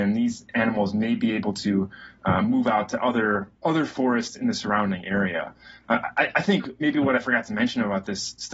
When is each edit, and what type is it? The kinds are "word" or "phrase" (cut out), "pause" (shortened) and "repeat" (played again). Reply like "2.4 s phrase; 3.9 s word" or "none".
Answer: 3.5 s pause